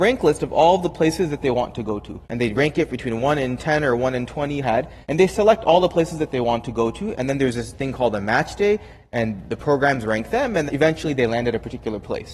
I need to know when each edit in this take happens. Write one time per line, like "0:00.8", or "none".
0:02.2
0:04.6
0:05.0
0:10.7